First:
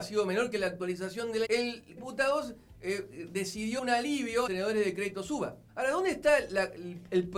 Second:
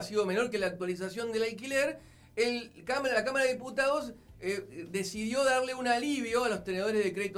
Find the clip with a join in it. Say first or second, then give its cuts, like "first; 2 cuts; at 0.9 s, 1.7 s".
first; 5 cuts; at 1.4 s, 2.0 s, 3.8 s, 4.5 s, 5.7 s